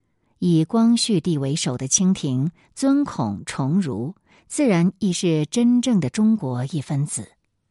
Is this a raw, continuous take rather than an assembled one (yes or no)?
yes